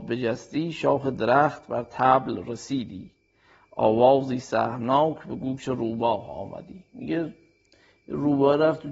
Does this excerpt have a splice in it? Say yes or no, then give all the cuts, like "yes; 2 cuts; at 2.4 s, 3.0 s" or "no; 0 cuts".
no; 0 cuts